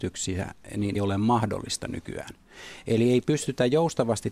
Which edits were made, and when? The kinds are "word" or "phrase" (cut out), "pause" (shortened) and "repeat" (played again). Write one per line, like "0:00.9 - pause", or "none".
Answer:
0:00.9 - word